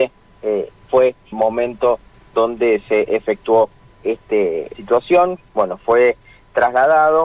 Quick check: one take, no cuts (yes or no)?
no